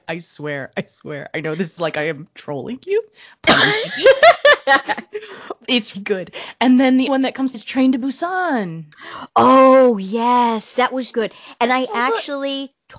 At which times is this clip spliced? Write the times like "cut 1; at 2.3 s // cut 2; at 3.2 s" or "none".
cut 1; at 1.8 s // cut 2; at 5.9 s // cut 3; at 7.1 s // cut 4; at 7.5 s // cut 5; at 11.1 s